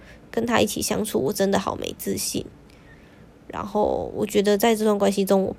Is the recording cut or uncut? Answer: uncut